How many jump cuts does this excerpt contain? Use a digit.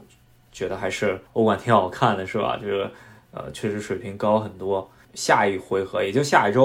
1